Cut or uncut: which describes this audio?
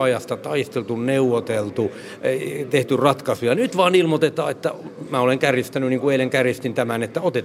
uncut